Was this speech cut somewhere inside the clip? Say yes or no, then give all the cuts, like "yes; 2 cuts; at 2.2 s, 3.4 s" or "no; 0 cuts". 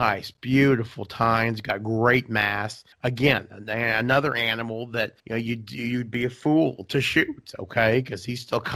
yes; 2 cuts; at 2.9 s, 5.2 s